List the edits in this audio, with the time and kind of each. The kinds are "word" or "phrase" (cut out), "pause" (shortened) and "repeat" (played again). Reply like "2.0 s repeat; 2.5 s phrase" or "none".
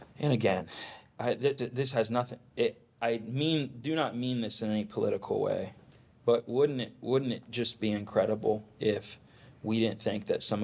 1.6 s word